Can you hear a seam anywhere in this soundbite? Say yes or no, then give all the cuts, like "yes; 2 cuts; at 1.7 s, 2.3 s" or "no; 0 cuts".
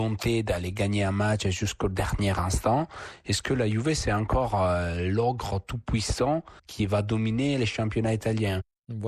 yes; 1 cut; at 6.6 s